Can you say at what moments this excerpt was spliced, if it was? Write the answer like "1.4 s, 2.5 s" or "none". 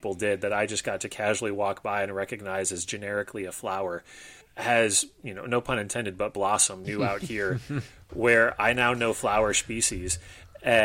4.4 s, 6.8 s